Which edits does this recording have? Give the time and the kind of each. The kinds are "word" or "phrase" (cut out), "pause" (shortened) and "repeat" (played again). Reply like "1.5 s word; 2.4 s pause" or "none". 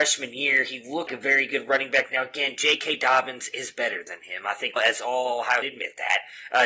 1.1 s word; 4.8 s phrase; 5.6 s phrase